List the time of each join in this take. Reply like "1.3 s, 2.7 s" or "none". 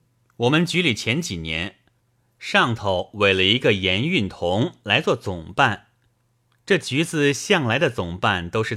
none